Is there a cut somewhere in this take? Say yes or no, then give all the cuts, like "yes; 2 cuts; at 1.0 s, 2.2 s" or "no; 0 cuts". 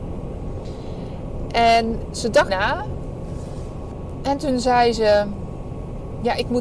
yes; 1 cut; at 2.5 s